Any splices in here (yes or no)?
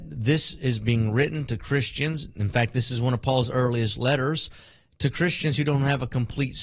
no